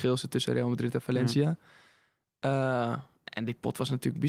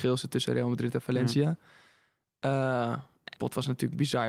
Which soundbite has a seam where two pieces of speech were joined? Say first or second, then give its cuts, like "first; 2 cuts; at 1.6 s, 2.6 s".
second; 1 cut; at 3.4 s